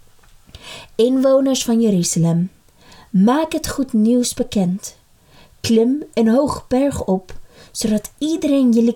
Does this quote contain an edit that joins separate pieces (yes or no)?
no